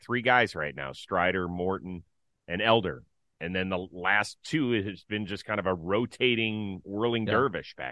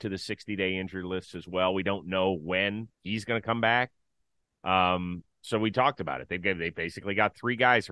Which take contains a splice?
second; 1 cut; at 2.9 s

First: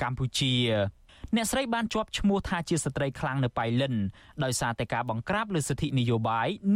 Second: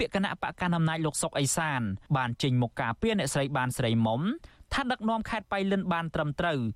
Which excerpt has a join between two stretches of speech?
second; 1 cut; at 2.1 s

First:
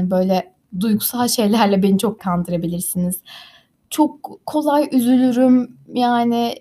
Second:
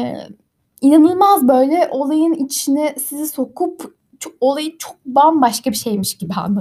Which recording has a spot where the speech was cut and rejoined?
first; 1 cut; at 2.2 s

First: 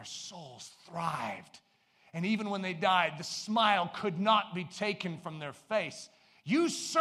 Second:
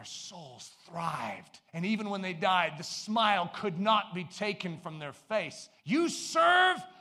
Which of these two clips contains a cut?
second; 2 cuts; at 1.7 s, 5.8 s

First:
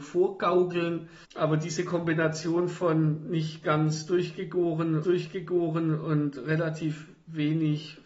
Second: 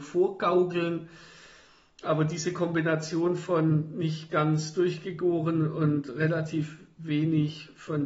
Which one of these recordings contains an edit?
first; 2 cuts; at 1.2 s, 5.0 s

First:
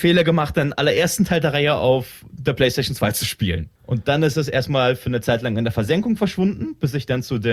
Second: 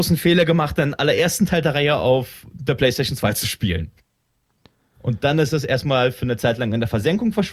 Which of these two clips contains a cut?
first; 1 cut; at 3.8 s

